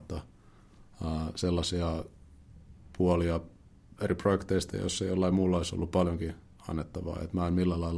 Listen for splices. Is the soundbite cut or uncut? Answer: uncut